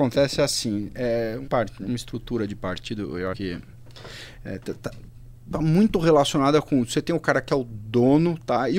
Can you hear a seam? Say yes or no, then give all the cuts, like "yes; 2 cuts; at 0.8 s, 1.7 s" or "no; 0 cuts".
yes; 2 cuts; at 1.5 s, 3.3 s